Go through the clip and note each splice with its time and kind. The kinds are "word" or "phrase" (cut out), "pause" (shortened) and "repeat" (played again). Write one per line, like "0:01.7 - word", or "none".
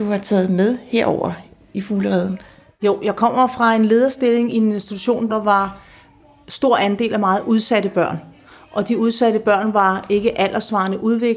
0:05.3 - word